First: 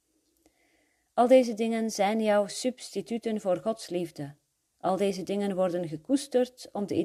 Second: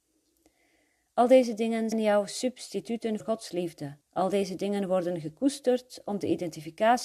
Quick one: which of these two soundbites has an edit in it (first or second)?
second